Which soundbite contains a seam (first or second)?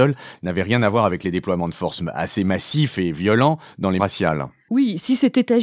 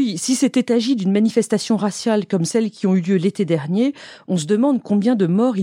first